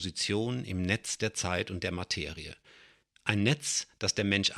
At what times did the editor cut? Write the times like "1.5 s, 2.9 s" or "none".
none